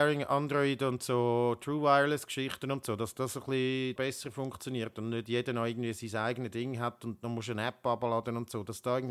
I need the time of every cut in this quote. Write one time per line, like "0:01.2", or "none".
0:04.0